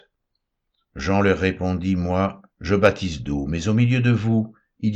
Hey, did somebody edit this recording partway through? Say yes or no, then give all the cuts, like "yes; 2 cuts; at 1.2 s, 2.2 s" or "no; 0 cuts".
yes; 1 cut; at 2.5 s